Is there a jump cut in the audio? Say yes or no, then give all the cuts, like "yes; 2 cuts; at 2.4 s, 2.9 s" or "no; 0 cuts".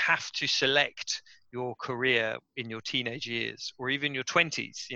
no; 0 cuts